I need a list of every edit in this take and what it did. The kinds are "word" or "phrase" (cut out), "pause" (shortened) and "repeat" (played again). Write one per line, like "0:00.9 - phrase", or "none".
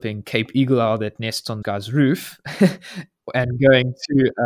0:01.6 - word